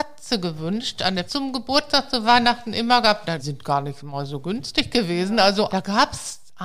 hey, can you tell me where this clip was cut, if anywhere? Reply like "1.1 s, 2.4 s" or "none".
1.3 s, 3.4 s, 5.7 s